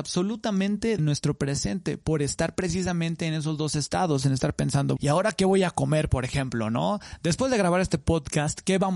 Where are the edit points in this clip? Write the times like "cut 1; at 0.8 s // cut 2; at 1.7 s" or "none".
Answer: cut 1; at 1.0 s // cut 2; at 5.0 s